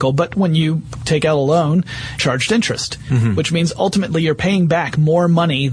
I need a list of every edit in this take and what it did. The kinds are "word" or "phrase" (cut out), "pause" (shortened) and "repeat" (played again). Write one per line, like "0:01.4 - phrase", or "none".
0:02.2 - word